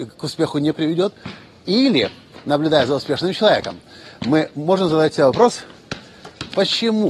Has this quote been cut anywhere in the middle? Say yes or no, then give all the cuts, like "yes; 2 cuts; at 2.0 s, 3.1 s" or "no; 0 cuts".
no; 0 cuts